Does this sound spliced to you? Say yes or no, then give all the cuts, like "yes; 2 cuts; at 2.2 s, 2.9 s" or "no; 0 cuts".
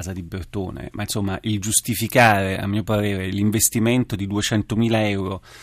no; 0 cuts